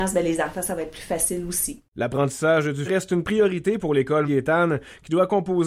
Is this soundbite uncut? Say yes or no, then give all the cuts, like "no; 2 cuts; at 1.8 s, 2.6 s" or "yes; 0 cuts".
no; 3 cuts; at 1.9 s, 2.9 s, 4.2 s